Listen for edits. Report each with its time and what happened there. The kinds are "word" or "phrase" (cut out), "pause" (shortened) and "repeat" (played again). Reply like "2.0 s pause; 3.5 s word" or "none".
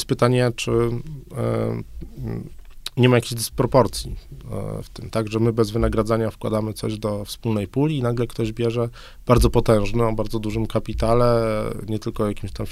none

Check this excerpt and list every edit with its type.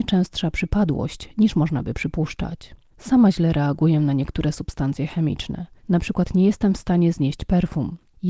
none

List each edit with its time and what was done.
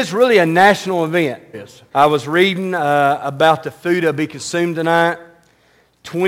1.5 s phrase; 1.9 s pause

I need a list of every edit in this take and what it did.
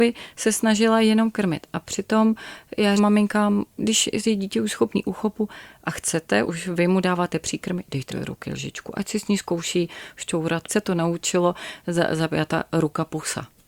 3.0 s word; 6.4 s word; 8.1 s word; 10.7 s phrase

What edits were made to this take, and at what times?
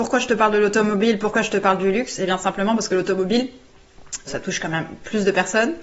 4.3 s word

